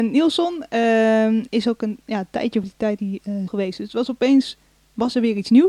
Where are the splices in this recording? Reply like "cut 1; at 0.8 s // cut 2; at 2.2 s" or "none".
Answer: cut 1; at 2.6 s // cut 2; at 3.0 s // cut 3; at 3.5 s